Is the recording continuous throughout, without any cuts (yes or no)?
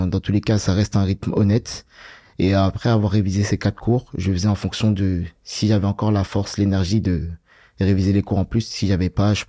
yes